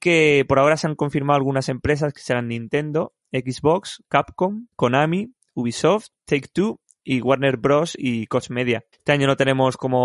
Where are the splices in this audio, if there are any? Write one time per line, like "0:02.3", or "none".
0:04.7
0:06.2
0:08.9